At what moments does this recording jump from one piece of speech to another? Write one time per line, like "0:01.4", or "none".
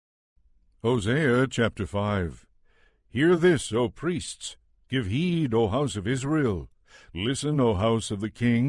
none